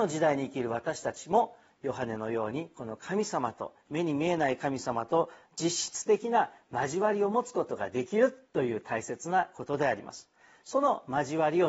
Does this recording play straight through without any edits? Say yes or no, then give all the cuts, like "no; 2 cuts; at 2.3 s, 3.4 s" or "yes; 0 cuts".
yes; 0 cuts